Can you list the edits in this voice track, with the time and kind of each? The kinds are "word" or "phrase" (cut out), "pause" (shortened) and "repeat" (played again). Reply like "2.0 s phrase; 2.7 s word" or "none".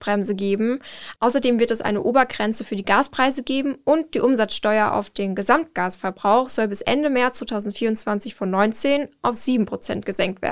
none